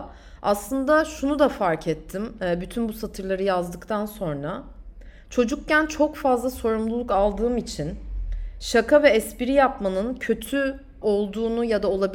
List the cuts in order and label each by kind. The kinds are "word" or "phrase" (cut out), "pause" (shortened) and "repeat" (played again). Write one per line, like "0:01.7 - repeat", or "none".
0:11.0 - word